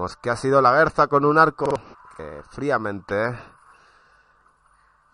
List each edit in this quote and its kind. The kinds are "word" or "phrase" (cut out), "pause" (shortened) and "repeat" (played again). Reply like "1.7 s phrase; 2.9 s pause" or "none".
1.9 s pause